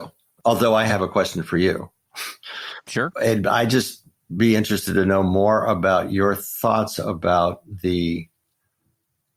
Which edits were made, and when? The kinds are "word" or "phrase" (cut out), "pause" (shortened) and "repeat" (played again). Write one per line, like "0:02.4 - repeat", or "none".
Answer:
none